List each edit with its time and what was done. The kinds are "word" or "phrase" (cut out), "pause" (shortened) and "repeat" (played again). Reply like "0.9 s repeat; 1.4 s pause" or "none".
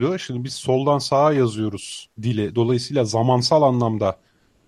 2.1 s pause